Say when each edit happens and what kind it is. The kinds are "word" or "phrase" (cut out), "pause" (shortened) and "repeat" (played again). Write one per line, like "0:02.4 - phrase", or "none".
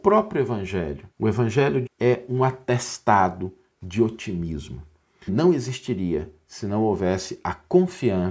0:01.1 - pause
0:01.9 - word
0:05.3 - phrase